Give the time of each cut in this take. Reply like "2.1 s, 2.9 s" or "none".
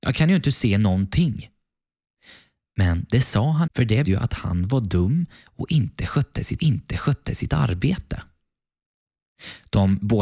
3.7 s, 4.0 s, 6.6 s

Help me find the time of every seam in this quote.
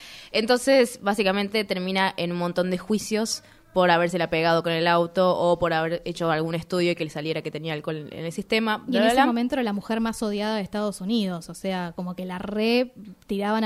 none

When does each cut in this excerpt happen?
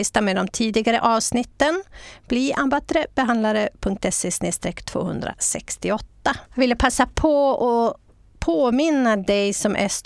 6.5 s

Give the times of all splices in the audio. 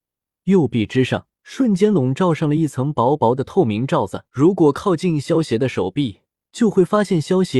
1.3 s, 4.3 s, 6.4 s

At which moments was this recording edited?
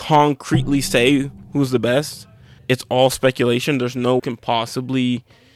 2.6 s, 4.2 s

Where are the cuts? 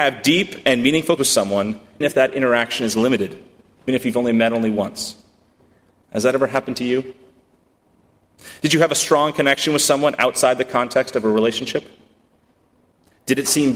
1.2 s, 2.0 s, 3.9 s

